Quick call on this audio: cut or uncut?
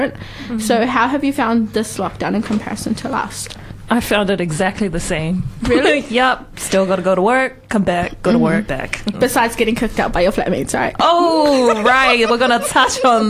cut